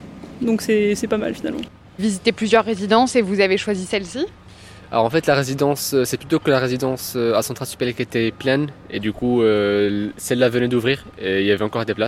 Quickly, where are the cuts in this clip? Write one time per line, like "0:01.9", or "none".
0:02.0

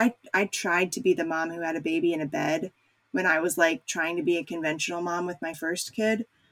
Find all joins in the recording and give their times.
none

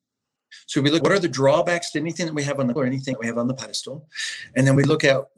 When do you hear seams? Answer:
0:01.0
0:02.8
0:03.1

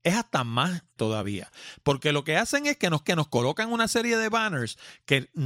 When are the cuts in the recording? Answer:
0:01.0
0:03.0

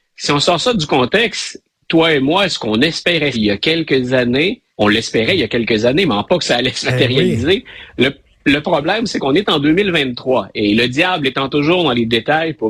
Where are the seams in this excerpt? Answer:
0:03.3
0:04.7
0:06.3

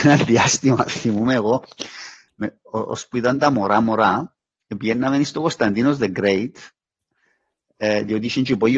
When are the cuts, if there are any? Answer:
none

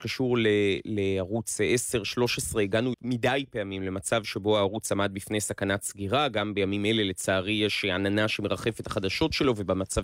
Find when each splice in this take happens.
0:02.9
0:08.8

